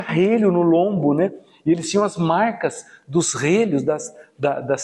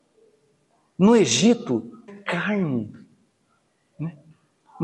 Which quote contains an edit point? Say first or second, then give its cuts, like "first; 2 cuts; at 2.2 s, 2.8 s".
second; 1 cut; at 2.1 s